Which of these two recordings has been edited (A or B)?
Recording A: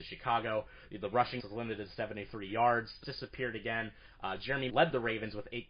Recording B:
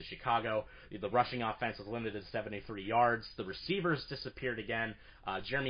A